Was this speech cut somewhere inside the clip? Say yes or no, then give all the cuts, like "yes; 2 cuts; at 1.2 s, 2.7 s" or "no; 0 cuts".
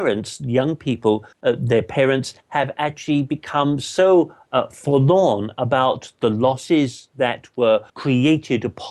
yes; 2 cuts; at 1.3 s, 7.9 s